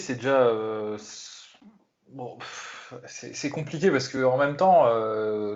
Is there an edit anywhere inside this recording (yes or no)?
no